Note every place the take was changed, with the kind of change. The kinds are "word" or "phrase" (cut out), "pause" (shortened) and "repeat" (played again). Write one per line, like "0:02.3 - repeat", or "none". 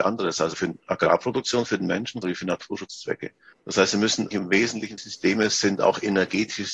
0:02.2 - word
0:03.5 - pause
0:04.3 - word
0:05.0 - phrase